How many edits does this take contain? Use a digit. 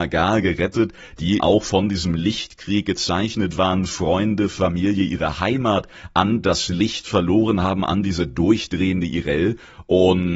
1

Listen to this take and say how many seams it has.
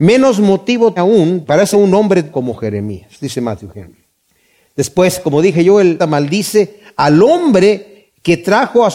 4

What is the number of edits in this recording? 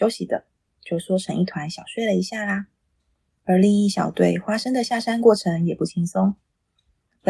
0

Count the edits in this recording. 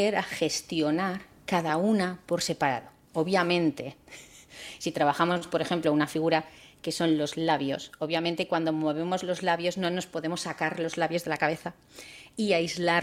0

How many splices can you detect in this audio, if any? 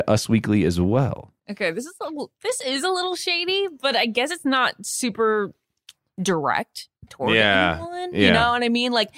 1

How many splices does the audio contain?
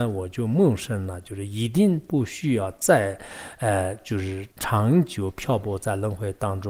1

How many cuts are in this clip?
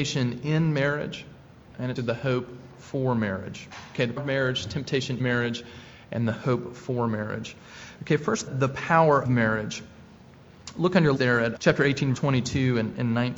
8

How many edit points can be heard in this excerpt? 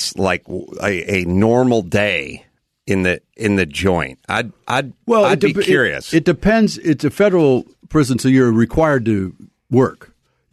0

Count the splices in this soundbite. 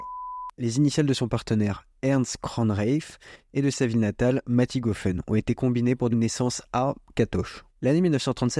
1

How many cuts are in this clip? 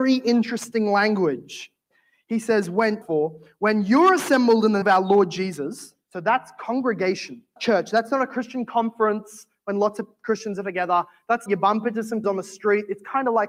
5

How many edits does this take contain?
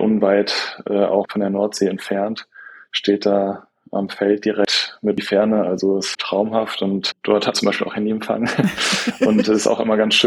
3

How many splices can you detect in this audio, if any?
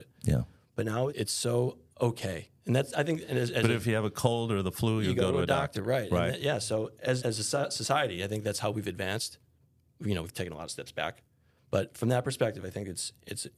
2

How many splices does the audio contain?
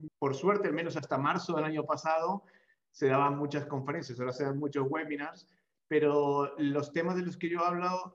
0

